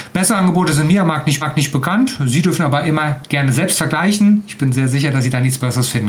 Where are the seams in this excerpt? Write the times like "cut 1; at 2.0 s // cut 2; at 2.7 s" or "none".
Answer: cut 1; at 1.4 s

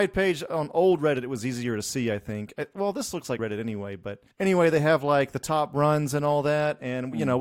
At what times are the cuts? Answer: cut 1; at 3.4 s // cut 2; at 4.3 s

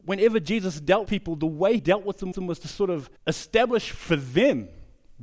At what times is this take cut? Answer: cut 1; at 1.1 s // cut 2; at 1.8 s // cut 3; at 2.3 s // cut 4; at 3.2 s

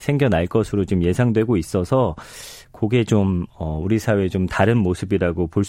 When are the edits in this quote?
none

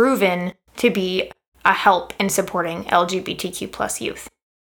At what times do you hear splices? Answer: none

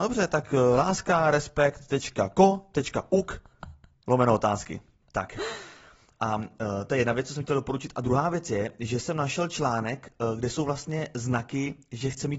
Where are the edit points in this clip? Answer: none

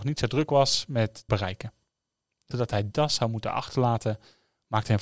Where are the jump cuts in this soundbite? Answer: cut 1; at 1.3 s // cut 2; at 2.5 s // cut 3; at 2.9 s

